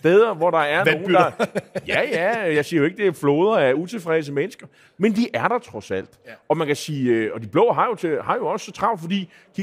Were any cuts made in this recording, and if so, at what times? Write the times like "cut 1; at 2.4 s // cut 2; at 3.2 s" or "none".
none